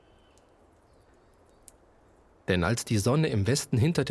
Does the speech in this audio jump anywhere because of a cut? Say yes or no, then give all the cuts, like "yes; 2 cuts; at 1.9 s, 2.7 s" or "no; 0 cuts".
no; 0 cuts